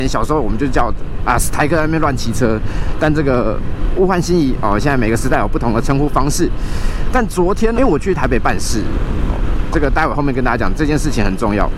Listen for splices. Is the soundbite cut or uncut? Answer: cut